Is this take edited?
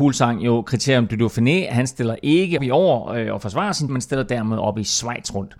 yes; 2 cuts; at 2.6 s, 3.9 s

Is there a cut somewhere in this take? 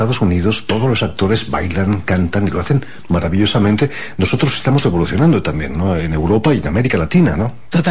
no; 0 cuts

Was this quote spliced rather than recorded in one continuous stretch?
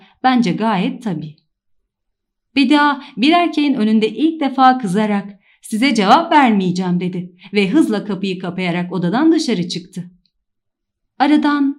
no; 0 cuts

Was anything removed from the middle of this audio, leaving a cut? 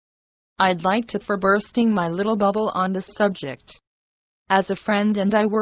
yes; 2 cuts; at 1.2 s, 3.1 s

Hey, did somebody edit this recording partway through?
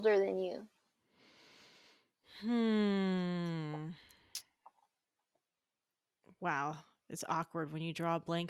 no; 0 cuts

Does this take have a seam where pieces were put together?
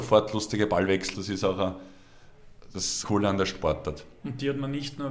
yes; 2 cuts; at 1.1 s, 3.0 s

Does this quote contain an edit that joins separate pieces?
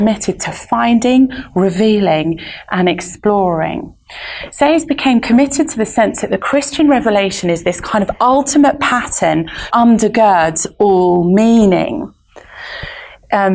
yes; 1 cut; at 9.7 s

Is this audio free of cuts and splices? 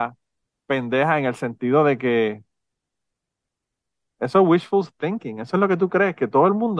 yes; 0 cuts

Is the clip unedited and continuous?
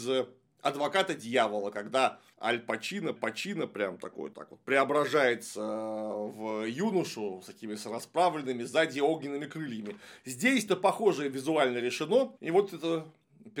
no; 5 cuts; at 2.3 s, 3.2 s, 4.3 s, 10.7 s, 12.4 s

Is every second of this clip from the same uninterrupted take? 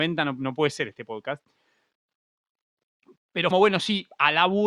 no; 1 cut; at 3.5 s

